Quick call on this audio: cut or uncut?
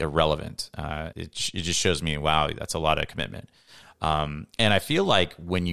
cut